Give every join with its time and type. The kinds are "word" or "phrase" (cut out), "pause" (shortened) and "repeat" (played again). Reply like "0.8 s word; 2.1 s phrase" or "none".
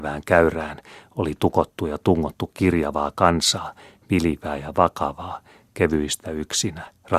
none

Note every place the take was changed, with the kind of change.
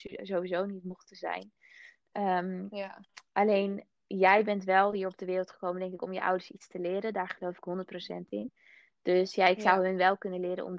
none

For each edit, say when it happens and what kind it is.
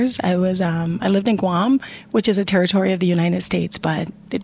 none

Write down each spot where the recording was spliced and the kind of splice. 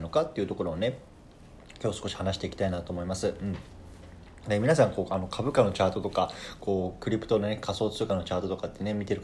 none

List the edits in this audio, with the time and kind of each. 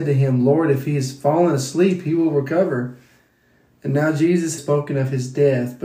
4.6 s word

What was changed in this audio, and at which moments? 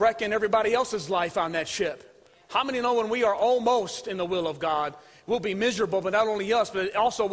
none

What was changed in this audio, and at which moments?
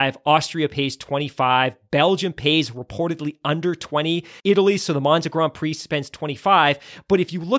4.4 s pause

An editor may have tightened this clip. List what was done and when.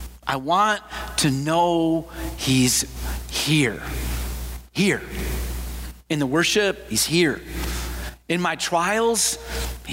none

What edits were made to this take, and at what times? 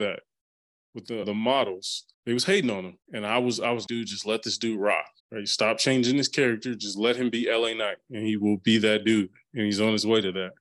1.2 s word; 2.1 s pause; 3.0 s pause; 3.9 s word; 5.2 s pause

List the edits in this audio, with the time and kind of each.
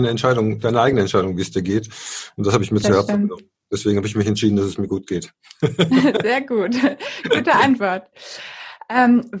none

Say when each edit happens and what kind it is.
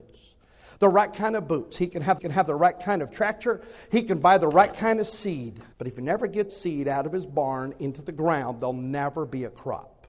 2.2 s repeat; 5.7 s pause; 6.5 s word

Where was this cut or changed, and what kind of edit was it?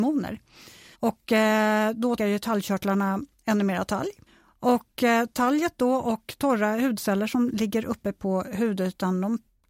0.9 s pause; 2.2 s word; 4.3 s pause

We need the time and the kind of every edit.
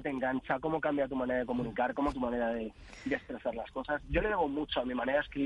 2.1 s word

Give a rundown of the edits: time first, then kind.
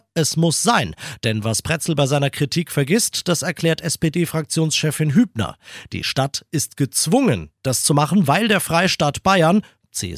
none

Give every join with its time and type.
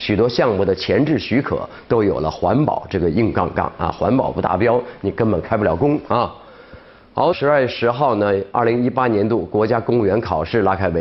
7.3 s phrase

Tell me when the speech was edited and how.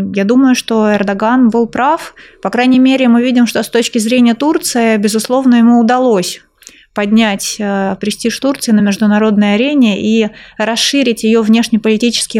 none

